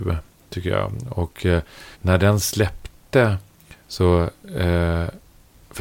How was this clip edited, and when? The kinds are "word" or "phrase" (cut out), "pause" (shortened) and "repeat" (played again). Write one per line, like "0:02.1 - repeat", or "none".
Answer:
0:01.9 - pause